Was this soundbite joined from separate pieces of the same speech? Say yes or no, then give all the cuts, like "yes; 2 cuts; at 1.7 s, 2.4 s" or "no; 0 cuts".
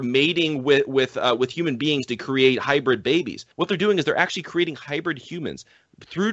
yes; 1 cut; at 3.5 s